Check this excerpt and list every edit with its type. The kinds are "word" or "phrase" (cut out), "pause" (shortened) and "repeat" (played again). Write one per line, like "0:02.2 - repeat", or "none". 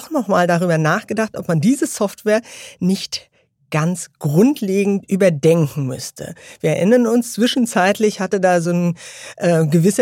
none